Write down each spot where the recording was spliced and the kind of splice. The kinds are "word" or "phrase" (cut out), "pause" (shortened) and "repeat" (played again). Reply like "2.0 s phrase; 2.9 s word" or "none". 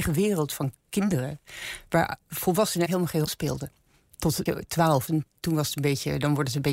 2.9 s word; 3.3 s word; 4.5 s word; 5.1 s word